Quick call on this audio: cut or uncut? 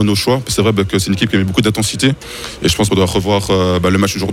cut